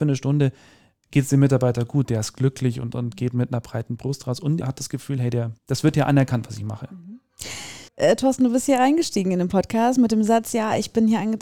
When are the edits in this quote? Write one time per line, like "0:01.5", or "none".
0:04.6
0:05.6
0:07.9